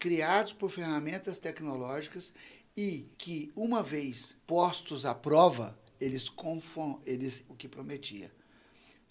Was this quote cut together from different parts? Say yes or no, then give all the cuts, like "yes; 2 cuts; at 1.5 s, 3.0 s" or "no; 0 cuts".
yes; 3 cuts; at 3.1 s, 4.4 s, 7.5 s